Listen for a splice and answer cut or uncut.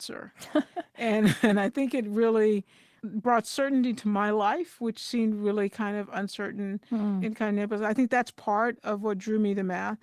uncut